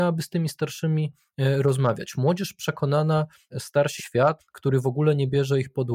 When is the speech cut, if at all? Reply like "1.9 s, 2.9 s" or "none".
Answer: 3.5 s, 4.0 s, 4.4 s